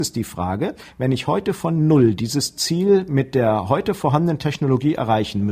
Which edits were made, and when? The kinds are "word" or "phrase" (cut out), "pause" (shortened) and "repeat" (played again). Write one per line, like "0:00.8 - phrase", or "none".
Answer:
none